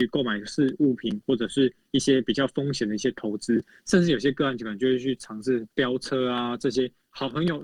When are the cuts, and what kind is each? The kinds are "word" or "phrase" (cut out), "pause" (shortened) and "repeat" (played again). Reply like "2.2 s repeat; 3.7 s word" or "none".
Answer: 5.7 s pause